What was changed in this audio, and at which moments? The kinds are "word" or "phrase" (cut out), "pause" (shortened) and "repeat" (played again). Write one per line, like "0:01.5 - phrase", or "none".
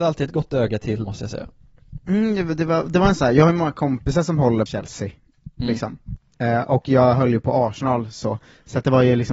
0:01.0 - word
0:03.2 - word
0:04.7 - word

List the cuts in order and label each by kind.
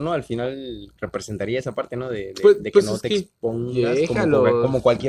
0:01.0 - pause

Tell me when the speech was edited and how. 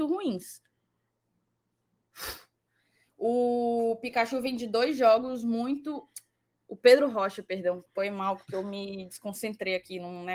none

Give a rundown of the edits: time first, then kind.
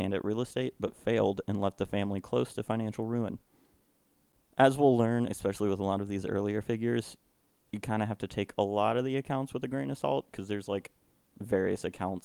none

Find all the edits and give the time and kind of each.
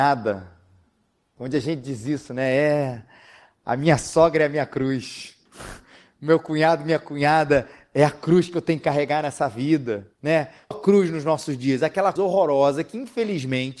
0:05.5 - pause
0:10.2 - pause
0:10.7 - phrase
0:12.2 - word

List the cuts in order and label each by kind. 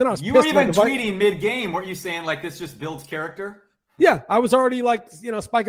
none

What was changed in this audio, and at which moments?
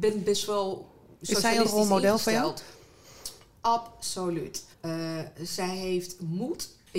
0:04.7 - pause

